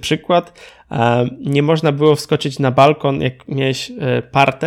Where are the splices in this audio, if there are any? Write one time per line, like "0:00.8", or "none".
none